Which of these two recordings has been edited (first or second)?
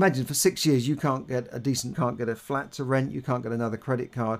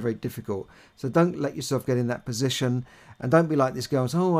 first